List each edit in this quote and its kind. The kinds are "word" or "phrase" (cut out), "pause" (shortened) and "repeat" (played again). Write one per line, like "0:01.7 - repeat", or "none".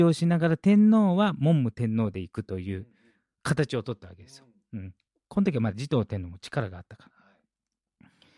none